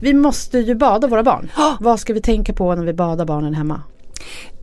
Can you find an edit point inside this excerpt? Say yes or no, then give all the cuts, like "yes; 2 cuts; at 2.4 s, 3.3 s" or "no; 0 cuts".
no; 0 cuts